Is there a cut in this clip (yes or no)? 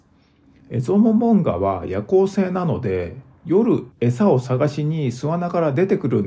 yes